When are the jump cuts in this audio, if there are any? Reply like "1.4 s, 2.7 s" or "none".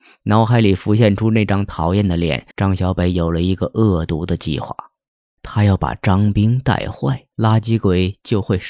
2.5 s, 5.1 s, 7.3 s